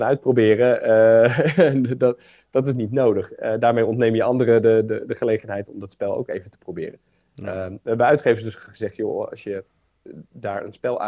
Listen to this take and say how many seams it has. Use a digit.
0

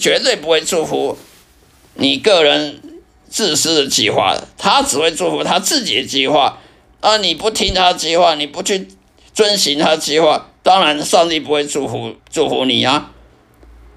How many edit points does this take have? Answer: 1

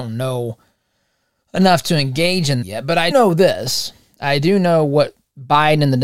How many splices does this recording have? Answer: 2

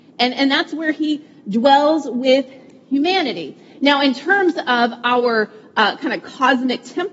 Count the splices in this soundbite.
0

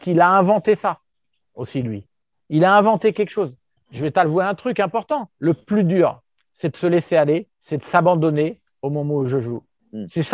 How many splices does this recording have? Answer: 0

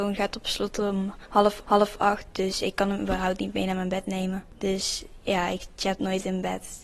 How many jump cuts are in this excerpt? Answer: 1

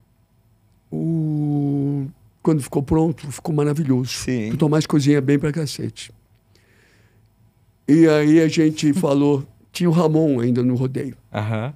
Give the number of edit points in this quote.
0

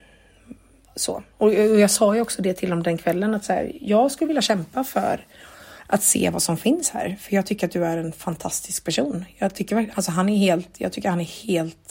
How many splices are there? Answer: 1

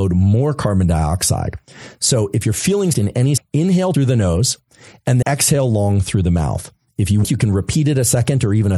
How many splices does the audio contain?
5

